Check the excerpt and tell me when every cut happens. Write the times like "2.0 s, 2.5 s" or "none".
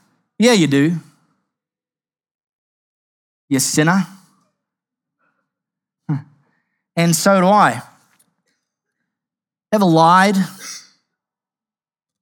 none